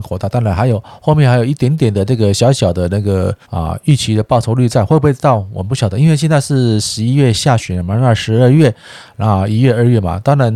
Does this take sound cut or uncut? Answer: cut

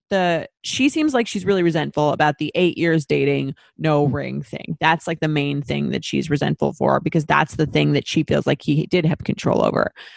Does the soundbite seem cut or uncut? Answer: uncut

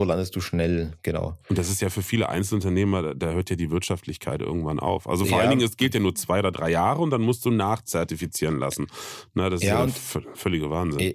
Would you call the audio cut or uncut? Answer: uncut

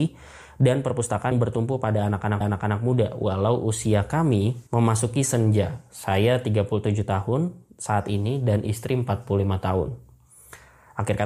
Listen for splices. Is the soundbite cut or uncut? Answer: cut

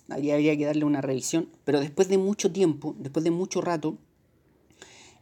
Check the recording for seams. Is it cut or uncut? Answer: uncut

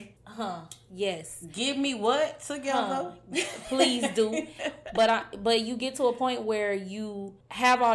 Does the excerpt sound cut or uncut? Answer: uncut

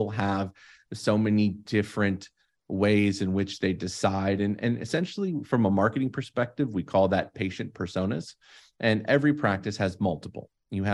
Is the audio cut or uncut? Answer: uncut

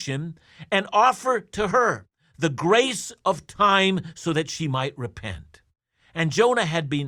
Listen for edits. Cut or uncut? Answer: uncut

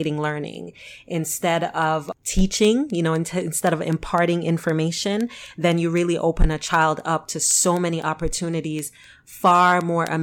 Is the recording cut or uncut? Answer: uncut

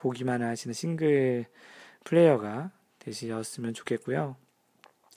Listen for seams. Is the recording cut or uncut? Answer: uncut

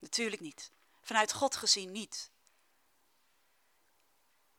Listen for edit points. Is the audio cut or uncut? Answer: uncut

